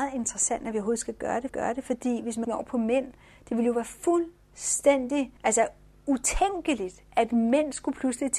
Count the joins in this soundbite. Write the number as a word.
three